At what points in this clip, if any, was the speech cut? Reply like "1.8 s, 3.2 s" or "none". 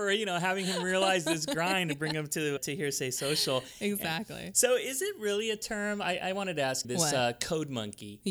2.6 s, 6.8 s